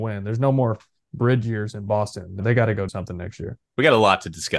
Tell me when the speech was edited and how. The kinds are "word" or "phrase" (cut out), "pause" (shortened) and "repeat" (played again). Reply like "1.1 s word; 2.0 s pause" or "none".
2.4 s word; 2.9 s word; 3.7 s pause